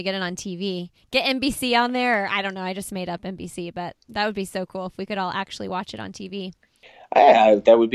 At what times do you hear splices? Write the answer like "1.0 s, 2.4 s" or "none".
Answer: none